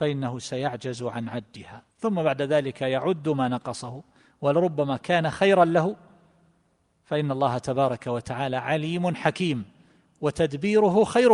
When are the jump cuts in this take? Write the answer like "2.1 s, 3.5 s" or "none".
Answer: 1.9 s